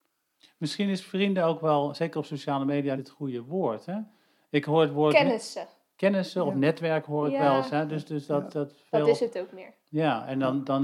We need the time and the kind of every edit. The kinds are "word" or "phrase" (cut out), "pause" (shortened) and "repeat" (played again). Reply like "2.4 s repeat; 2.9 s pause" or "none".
3.0 s word